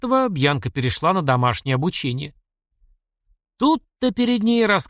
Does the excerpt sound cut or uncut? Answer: uncut